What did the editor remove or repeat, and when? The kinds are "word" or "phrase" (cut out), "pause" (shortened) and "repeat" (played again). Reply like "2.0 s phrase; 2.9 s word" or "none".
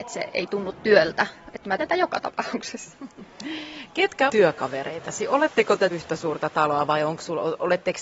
1.8 s word; 4.3 s word; 5.9 s word